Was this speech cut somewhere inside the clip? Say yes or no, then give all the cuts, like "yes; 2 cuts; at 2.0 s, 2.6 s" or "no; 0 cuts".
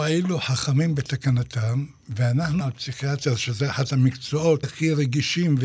yes; 2 cuts; at 2.6 s, 4.6 s